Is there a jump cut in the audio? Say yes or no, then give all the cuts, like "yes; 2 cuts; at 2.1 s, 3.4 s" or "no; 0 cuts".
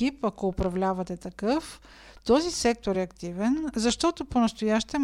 no; 0 cuts